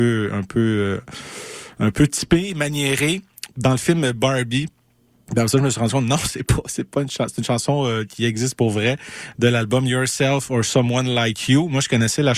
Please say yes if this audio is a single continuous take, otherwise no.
yes